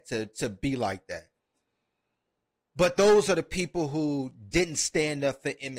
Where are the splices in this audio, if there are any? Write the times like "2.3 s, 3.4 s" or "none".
none